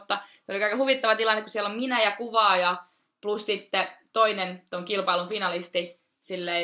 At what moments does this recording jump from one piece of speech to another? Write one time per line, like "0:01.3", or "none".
none